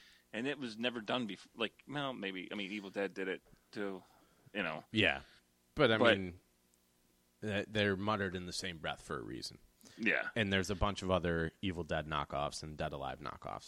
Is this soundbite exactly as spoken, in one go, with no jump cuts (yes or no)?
yes